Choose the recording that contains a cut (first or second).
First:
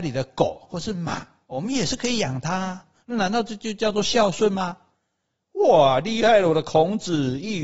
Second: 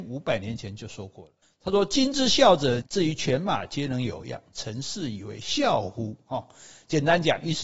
second